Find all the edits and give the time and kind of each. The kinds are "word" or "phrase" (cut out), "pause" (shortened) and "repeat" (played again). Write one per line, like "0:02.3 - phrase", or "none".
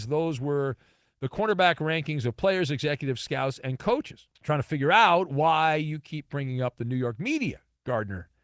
0:04.4 - pause